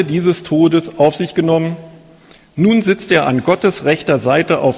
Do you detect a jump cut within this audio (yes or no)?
no